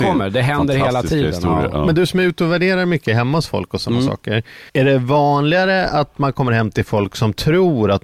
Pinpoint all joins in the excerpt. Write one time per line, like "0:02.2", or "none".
0:04.7